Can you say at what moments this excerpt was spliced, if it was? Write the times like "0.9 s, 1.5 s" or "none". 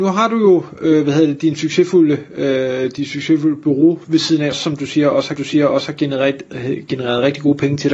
4.5 s, 5.4 s